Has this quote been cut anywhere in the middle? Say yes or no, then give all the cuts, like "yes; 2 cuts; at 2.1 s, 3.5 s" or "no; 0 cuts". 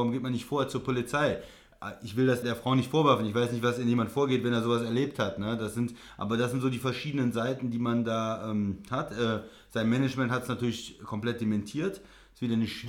yes; 1 cut; at 2.4 s